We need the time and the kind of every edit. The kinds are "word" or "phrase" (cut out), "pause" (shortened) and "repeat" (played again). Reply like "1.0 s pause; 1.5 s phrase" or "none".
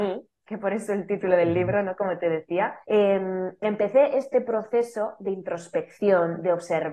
2.8 s pause